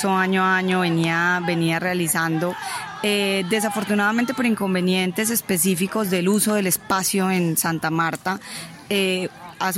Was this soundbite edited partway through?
no; 0 cuts

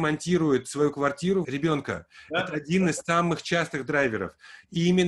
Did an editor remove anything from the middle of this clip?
yes; 1 cut; at 1.4 s

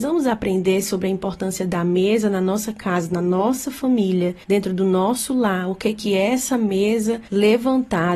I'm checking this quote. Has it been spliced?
yes; 2 cuts; at 4.4 s, 7.3 s

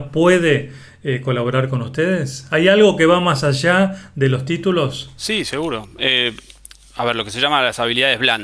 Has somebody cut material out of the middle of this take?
no; 0 cuts

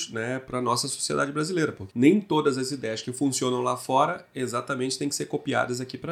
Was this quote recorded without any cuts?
no; 1 cut; at 1.9 s

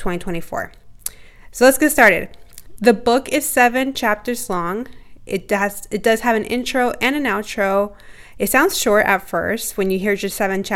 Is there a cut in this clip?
no; 0 cuts

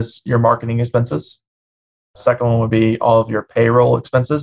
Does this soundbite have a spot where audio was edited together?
no; 0 cuts

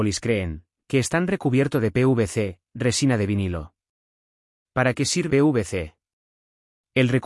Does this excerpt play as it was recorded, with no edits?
no; 1 cut; at 5.3 s

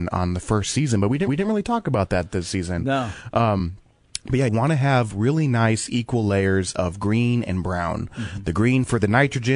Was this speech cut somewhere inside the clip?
yes; 2 cuts; at 1.3 s, 4.5 s

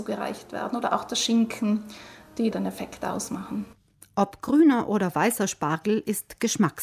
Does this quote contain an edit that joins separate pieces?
no; 0 cuts

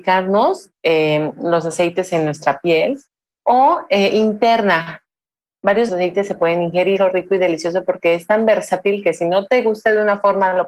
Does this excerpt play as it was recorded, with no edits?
no; 2 cuts; at 5.9 s, 7.0 s

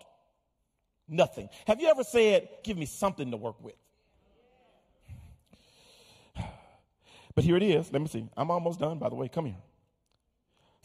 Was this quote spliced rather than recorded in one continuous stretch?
yes; 1 cut; at 2.6 s

